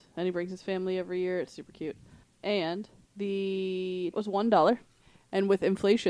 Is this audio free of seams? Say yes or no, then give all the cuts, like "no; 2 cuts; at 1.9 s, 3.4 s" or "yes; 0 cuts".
no; 2 cuts; at 4.1 s, 5.0 s